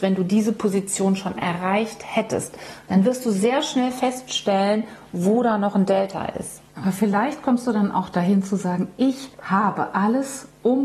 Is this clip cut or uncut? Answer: cut